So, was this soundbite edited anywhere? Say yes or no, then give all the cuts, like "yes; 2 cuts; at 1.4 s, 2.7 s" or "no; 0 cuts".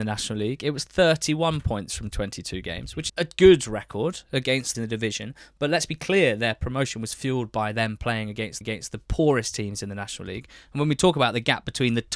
yes; 3 cuts; at 3.1 s, 4.7 s, 8.6 s